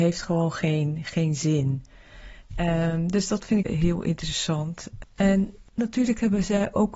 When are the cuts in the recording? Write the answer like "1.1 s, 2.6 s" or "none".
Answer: 3.6 s